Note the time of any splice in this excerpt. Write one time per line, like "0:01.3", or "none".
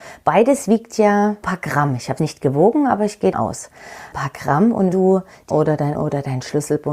0:01.4
0:02.2
0:03.3
0:04.9
0:05.5
0:05.9